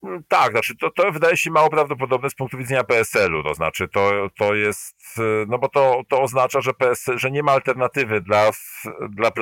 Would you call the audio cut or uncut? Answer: uncut